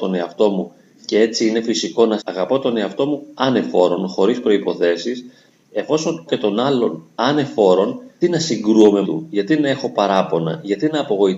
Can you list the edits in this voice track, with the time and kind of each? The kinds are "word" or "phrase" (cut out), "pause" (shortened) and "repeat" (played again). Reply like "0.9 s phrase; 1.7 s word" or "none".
2.2 s word; 6.3 s word; 8.2 s word; 9.0 s word